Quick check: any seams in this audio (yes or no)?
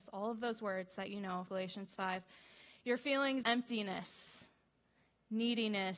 yes